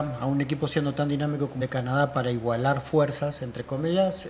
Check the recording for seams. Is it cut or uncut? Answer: cut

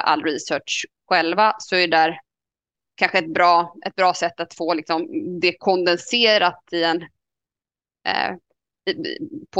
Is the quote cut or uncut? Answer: uncut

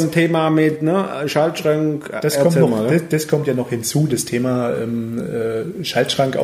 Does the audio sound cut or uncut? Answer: uncut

